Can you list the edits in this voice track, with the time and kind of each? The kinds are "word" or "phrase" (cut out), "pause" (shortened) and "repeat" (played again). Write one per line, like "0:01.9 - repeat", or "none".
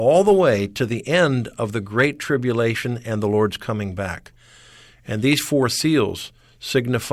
none